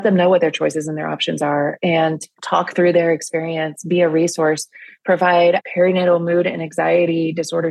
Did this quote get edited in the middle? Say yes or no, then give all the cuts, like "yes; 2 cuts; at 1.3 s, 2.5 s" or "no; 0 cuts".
no; 0 cuts